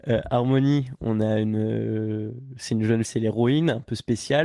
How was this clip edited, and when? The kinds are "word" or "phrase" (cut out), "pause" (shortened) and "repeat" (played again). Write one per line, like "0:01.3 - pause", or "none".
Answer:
0:03.0 - word